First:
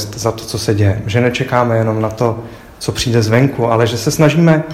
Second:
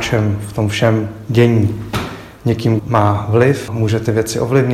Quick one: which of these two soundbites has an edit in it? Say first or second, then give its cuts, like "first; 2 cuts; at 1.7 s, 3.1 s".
second; 2 cuts; at 2.8 s, 3.7 s